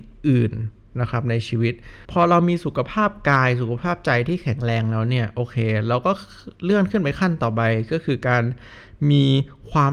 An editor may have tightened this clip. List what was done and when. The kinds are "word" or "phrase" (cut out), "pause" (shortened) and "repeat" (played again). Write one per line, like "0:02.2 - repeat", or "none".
0:02.0 - pause
0:06.5 - pause